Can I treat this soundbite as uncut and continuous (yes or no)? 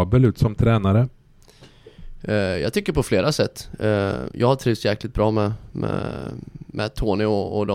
yes